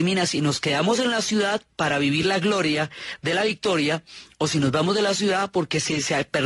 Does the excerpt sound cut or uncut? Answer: uncut